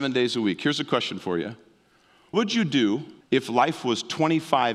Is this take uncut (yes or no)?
no